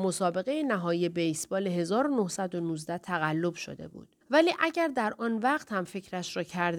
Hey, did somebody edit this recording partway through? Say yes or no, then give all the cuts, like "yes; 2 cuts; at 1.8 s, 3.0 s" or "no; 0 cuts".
yes; 1 cut; at 4.2 s